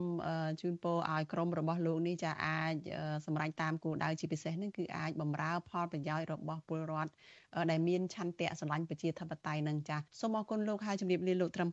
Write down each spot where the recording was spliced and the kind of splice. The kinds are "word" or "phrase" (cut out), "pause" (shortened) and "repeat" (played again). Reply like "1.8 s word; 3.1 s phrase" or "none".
10.1 s pause